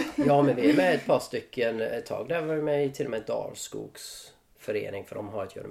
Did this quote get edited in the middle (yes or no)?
no